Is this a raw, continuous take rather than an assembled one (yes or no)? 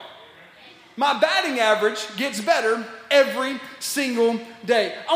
yes